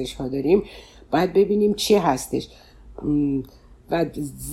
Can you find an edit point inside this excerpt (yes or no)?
no